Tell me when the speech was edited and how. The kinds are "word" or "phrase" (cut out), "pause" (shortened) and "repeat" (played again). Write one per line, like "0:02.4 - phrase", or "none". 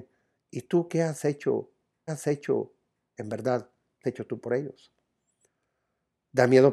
0:02.1 - repeat
0:04.0 - word